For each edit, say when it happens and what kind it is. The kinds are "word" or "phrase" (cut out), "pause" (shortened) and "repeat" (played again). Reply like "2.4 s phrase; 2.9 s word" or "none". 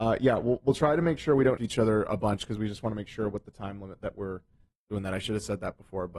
1.6 s word